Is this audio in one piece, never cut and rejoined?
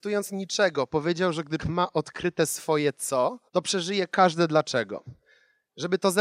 no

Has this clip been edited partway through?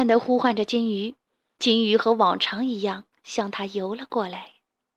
no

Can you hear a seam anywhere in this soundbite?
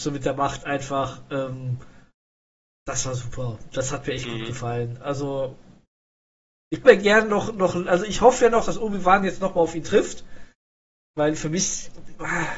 yes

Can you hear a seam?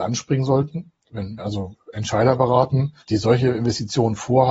yes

